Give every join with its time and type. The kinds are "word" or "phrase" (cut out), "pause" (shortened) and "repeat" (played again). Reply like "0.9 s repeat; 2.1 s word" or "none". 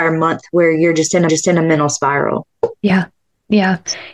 1.3 s repeat